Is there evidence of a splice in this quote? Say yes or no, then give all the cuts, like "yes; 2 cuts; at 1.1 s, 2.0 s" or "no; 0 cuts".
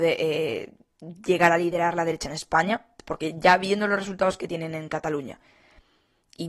no; 0 cuts